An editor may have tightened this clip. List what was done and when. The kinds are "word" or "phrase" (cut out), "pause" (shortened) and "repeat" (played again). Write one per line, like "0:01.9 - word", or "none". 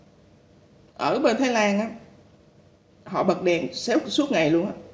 none